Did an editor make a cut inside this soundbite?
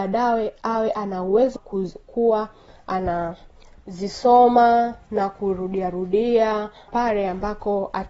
yes; 2 cuts; at 1.6 s, 6.9 s

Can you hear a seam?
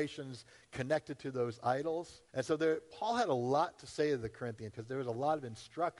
yes; 2 cuts; at 2.3 s, 4.7 s

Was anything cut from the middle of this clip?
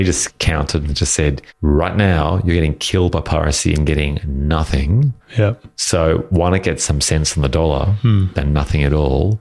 no; 0 cuts

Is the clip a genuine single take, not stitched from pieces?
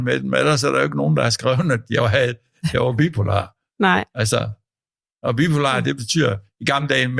yes; 0 cuts

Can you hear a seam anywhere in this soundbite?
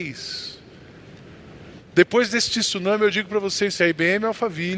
yes; 1 cut; at 3.8 s

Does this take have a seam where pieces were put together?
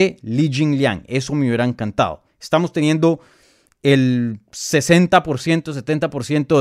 no; 0 cuts

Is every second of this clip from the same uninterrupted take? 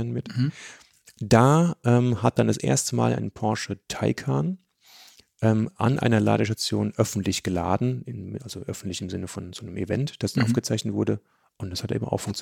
yes; 0 cuts

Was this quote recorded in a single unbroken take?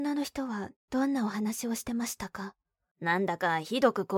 no; 1 cut; at 2.6 s

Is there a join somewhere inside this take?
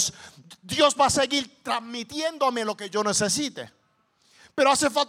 no; 0 cuts

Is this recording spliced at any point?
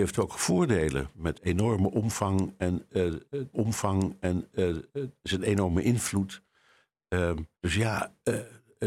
yes; 3 cuts; at 1.3 s, 3.5 s, 7.5 s

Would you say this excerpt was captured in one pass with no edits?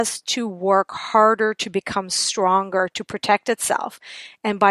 yes; 0 cuts

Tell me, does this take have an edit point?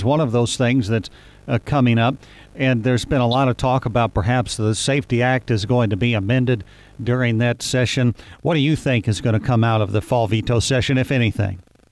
no; 0 cuts

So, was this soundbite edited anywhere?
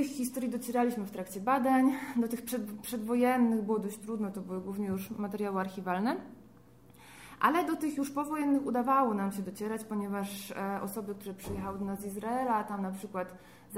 no; 0 cuts

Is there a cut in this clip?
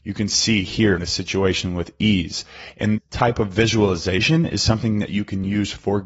yes; 2 cuts; at 1.0 s, 3.0 s

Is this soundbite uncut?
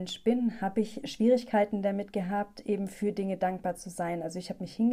no; 1 cut; at 1.0 s

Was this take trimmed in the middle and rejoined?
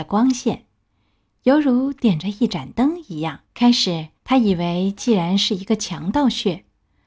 yes; 2 cuts; at 3.4 s, 4.2 s

